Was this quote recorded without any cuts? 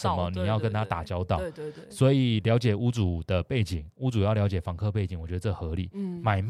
yes; 0 cuts

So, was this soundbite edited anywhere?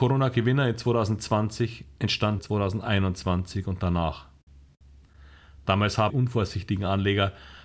yes; 2 cuts; at 2.4 s, 6.1 s

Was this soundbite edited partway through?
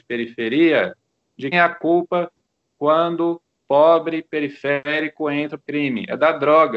yes; 4 cuts; at 1.5 s, 3.6 s, 4.3 s, 5.6 s

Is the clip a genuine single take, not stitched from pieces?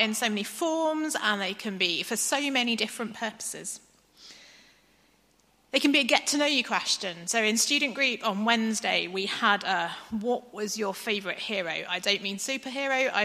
yes; 0 cuts

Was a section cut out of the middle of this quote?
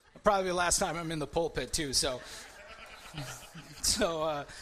no; 0 cuts

